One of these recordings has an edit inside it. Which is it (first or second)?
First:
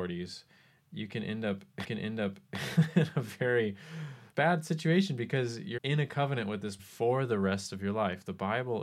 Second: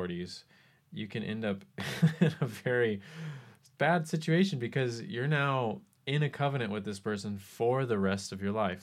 first